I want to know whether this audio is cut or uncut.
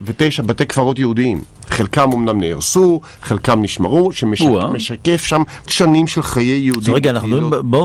cut